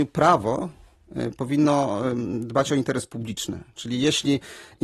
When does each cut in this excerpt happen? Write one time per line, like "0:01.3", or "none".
none

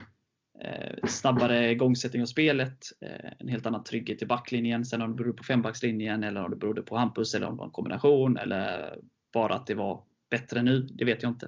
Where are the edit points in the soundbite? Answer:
none

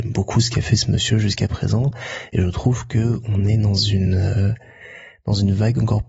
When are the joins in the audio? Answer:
none

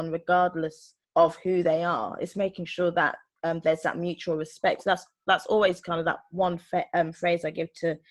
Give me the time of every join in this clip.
0:01.0

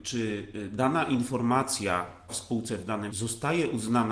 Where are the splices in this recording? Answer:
0:02.3
0:03.1

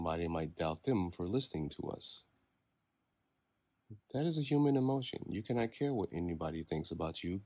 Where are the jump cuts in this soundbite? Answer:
none

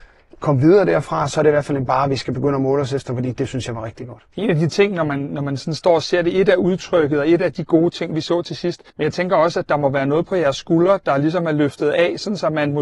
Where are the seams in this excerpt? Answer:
0:04.3
0:08.9

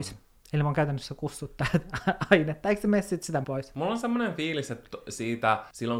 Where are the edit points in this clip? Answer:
0:03.4

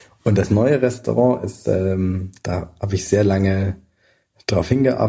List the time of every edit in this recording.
none

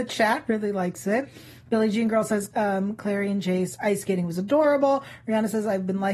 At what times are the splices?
0:02.5

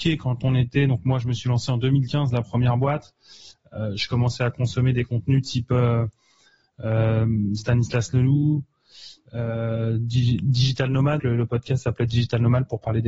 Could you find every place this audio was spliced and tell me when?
0:11.2

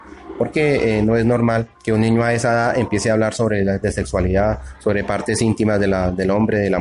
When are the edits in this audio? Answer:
0:01.7
0:03.8

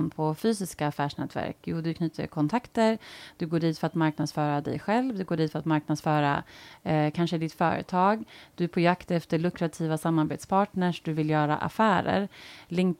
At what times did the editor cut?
none

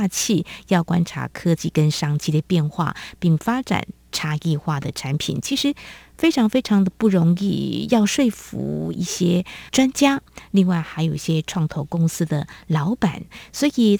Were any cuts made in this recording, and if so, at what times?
0:09.7

